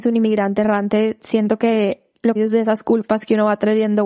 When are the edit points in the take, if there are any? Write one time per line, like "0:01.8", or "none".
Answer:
0:02.4